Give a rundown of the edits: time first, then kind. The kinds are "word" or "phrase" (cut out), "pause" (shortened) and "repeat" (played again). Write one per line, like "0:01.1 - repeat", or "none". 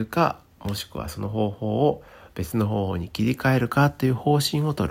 none